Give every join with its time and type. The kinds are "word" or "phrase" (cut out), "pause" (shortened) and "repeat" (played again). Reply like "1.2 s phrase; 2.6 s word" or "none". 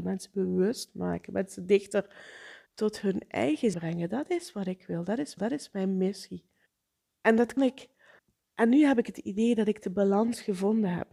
2.7 s pause; 3.7 s word; 5.4 s repeat; 6.7 s pause; 7.6 s word; 8.2 s pause